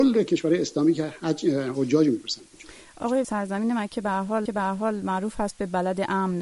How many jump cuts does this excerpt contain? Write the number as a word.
two